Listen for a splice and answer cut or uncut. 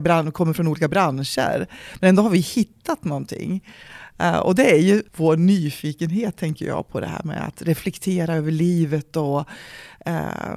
cut